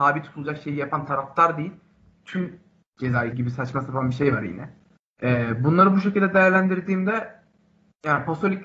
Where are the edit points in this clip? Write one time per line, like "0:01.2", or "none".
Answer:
0:02.8
0:03.3
0:05.0